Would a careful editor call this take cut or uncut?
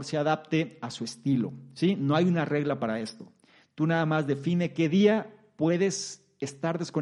uncut